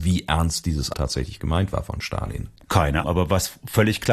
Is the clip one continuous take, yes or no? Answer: no